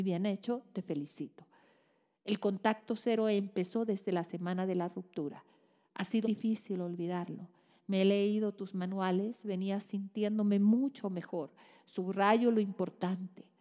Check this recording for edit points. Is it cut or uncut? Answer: cut